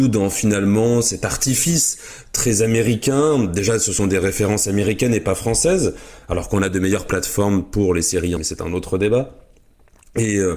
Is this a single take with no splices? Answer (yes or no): no